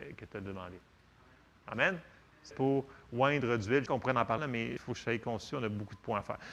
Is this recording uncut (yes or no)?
no